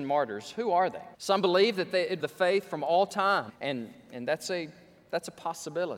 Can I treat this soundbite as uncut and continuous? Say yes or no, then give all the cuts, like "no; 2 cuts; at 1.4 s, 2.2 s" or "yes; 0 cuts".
no; 3 cuts; at 1.1 s, 2.2 s, 3.5 s